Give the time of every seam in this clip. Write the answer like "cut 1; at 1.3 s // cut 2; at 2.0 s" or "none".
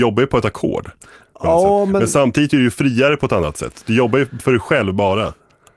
none